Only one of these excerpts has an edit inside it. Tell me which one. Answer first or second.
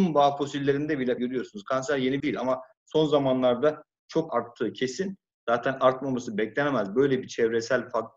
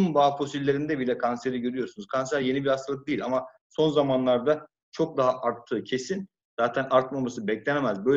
first